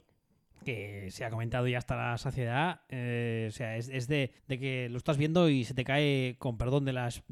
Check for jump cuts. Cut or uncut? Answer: cut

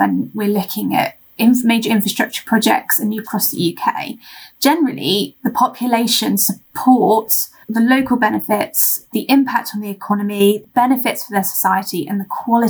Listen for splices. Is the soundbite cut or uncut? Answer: cut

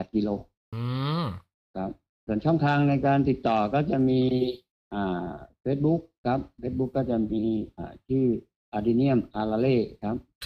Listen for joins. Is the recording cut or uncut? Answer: uncut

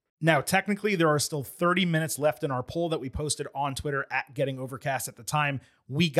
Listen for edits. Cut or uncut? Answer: uncut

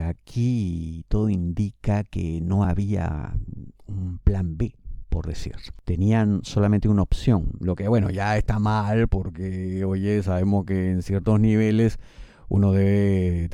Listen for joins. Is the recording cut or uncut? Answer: uncut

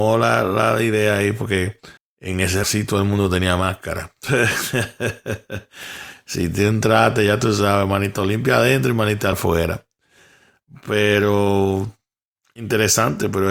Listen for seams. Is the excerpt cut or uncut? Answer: cut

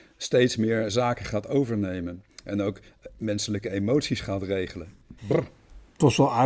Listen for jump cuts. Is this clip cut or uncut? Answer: cut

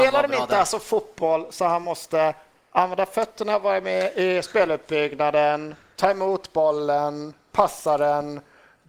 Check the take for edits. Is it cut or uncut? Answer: uncut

